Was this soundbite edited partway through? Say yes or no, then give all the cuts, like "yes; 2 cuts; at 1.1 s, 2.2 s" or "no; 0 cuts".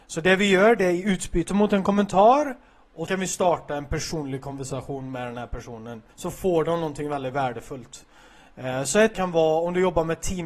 yes; 3 cuts; at 3.1 s, 6.1 s, 9.1 s